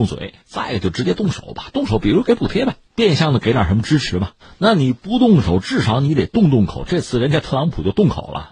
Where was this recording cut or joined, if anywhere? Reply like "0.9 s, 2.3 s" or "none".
2.8 s, 4.4 s